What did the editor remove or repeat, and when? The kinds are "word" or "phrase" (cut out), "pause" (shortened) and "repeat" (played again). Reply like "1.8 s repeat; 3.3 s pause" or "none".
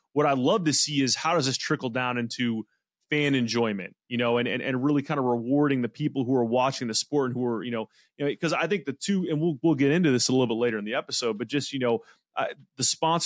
none